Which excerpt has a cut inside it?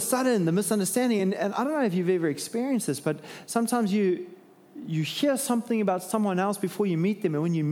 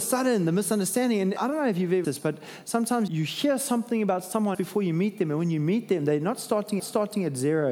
second; 5 cuts; at 1.4 s, 2.0 s, 3.1 s, 4.5 s, 6.8 s

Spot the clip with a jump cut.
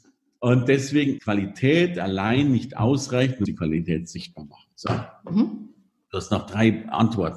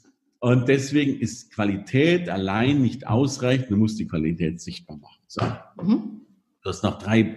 first; 2 cuts; at 1.2 s, 3.5 s

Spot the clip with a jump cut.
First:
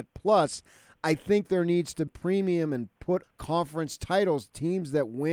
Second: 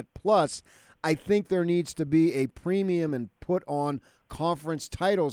first; 2 cuts; at 2.1 s, 3.2 s

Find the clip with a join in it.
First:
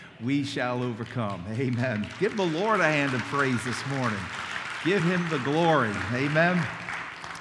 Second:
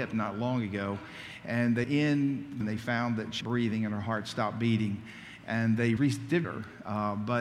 second; 5 cuts; at 1.8 s, 2.6 s, 3.4 s, 6.0 s, 6.4 s

